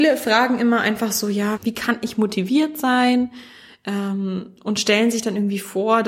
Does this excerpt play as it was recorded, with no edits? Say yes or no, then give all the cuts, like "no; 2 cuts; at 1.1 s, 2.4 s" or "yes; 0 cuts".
no; 1 cut; at 1.6 s